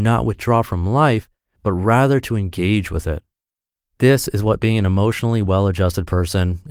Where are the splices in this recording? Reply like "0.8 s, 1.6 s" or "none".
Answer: none

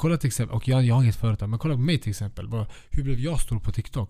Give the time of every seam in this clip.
none

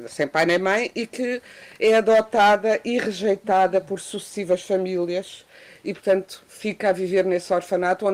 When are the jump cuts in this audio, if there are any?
none

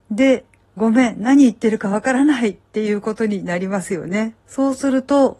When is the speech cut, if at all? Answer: 4.4 s

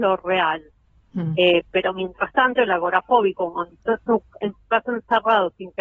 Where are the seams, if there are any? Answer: none

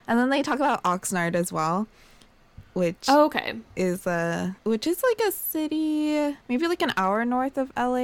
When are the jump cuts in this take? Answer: 4.6 s, 6.4 s

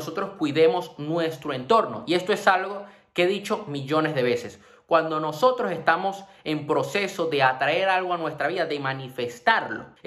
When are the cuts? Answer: none

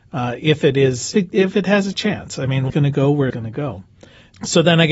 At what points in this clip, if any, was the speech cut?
1.1 s, 2.7 s, 3.3 s

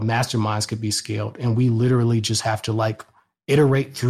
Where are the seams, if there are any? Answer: none

